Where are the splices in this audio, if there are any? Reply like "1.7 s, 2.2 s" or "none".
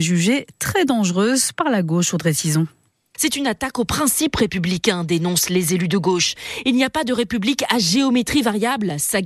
none